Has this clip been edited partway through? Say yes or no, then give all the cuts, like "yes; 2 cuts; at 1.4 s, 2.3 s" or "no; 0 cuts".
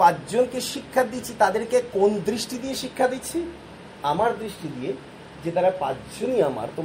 no; 0 cuts